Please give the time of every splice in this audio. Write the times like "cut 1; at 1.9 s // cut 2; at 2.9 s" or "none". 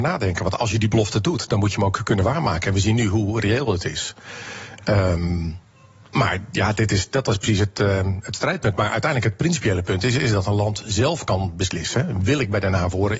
none